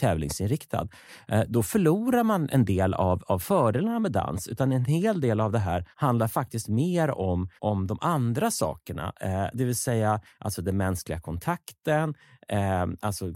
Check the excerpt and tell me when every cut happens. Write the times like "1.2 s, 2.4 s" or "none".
5.9 s, 7.6 s